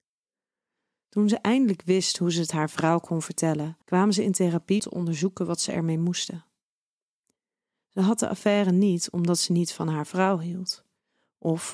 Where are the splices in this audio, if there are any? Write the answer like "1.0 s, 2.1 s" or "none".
3.8 s, 4.8 s